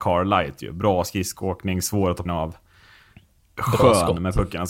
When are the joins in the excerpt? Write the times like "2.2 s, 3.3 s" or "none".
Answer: 2.3 s